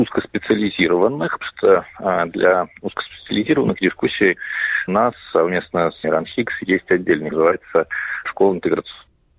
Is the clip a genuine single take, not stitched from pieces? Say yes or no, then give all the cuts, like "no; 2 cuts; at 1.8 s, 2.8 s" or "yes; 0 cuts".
no; 5 cuts; at 1.4 s, 4.9 s, 6.0 s, 7.3 s, 8.3 s